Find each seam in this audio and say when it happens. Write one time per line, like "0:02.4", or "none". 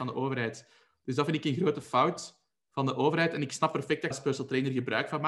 0:04.1